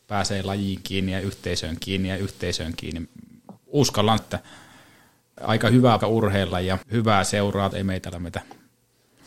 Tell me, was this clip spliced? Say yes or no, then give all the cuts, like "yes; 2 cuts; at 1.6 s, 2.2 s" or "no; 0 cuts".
yes; 7 cuts; at 1.8 s, 4.2 s, 5.4 s, 6.0 s, 6.8 s, 7.7 s, 8.1 s